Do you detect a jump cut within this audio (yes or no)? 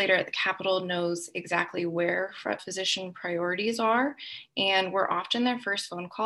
yes